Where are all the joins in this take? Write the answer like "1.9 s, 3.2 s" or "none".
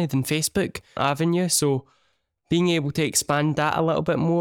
1.0 s